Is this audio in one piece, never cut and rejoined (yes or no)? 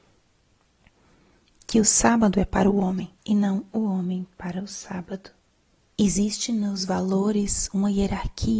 no